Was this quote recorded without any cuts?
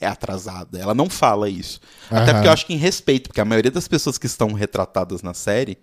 yes; 0 cuts

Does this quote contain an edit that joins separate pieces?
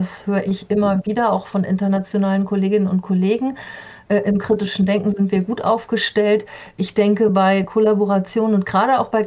no; 0 cuts

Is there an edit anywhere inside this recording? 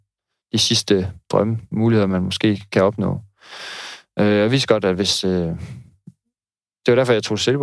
no; 0 cuts

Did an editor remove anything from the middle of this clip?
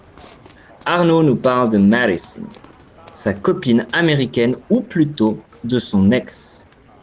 yes; 1 cut; at 5.4 s

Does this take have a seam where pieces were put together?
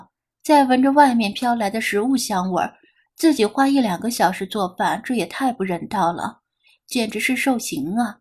no; 0 cuts

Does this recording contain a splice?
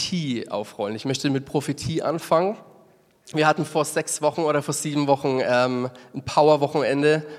no; 0 cuts

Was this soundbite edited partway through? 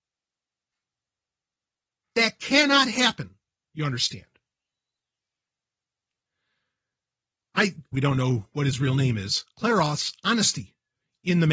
yes; 1 cut; at 7.9 s

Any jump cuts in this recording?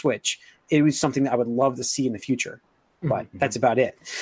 no; 0 cuts

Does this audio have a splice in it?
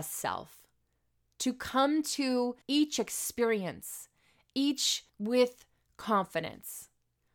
yes; 2 cuts; at 2.6 s, 5.1 s

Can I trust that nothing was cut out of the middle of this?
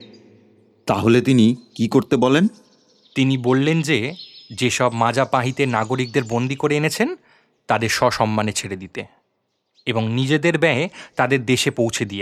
yes; 0 cuts

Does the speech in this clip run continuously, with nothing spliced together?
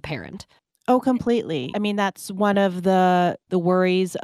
yes; 0 cuts

